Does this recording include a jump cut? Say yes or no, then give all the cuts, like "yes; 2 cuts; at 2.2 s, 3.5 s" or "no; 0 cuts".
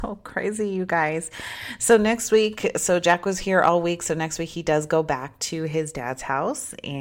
no; 0 cuts